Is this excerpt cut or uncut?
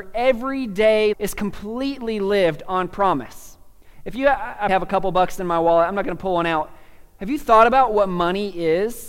cut